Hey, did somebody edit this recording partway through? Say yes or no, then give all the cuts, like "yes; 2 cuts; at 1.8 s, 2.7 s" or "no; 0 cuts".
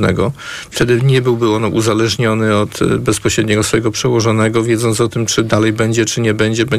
no; 0 cuts